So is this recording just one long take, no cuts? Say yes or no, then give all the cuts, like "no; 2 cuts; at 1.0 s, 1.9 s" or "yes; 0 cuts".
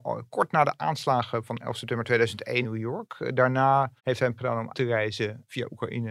no; 4 cuts; at 2.6 s, 4.0 s, 4.4 s, 4.7 s